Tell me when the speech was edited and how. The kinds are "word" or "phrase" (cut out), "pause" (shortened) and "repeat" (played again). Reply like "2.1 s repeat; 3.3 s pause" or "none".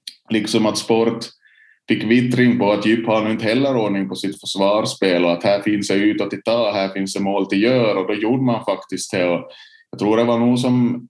none

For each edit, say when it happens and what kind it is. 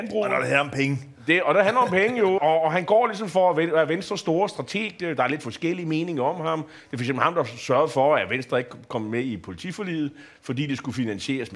2.4 s word

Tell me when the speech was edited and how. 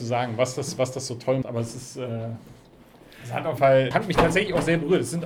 1.4 s word; 3.6 s word; 3.9 s word

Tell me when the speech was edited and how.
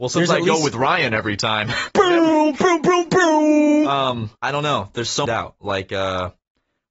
4.4 s pause; 5.3 s phrase

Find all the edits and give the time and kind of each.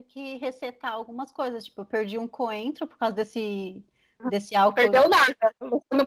none

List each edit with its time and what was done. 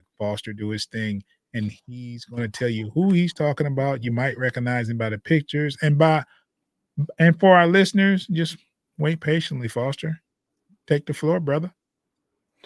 none

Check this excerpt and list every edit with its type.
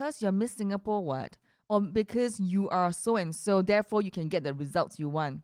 none

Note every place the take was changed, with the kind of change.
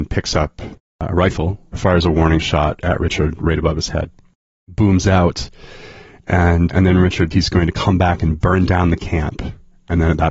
6.7 s word; 7.3 s word

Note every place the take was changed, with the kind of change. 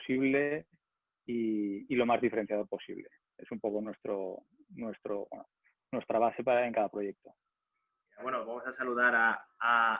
none

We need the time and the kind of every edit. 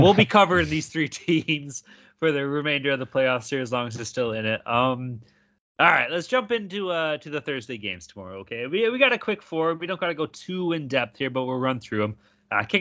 none

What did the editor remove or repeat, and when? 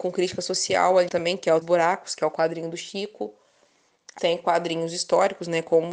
1.1 s word; 1.6 s word; 4.2 s word

